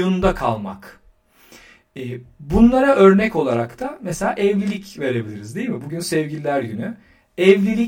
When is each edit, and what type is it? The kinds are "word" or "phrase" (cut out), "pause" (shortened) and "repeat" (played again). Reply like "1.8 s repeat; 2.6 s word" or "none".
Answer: none